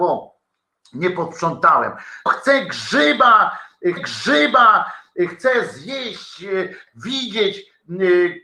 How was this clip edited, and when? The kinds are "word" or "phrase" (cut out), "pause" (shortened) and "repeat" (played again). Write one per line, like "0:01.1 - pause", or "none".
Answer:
0:02.3 - word
0:04.0 - repeat
0:06.9 - word